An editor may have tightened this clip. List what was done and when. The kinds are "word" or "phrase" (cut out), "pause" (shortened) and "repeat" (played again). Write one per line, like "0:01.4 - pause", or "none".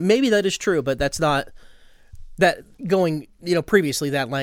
0:02.8 - pause